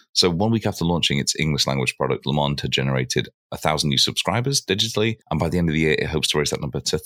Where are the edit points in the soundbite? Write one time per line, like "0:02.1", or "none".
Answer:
0:05.2